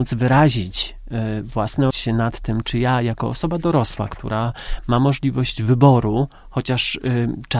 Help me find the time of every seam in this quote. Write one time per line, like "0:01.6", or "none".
0:01.9